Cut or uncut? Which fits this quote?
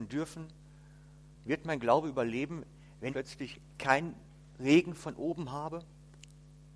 cut